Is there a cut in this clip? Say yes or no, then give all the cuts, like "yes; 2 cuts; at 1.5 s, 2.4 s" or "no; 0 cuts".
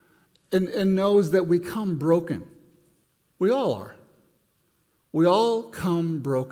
yes; 1 cut; at 3.0 s